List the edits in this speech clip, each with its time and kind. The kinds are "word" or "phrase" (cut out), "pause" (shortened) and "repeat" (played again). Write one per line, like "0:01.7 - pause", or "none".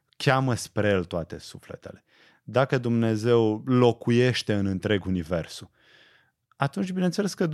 none

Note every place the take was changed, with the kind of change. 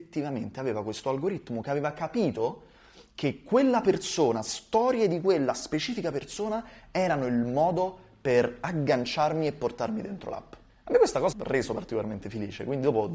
0:10.7 - pause
0:11.3 - phrase

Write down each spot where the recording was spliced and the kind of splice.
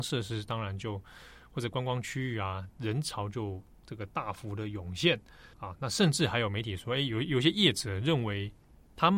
0:05.5 - pause

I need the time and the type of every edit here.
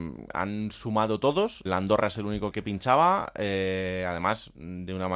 0:01.7 - word
0:02.5 - word

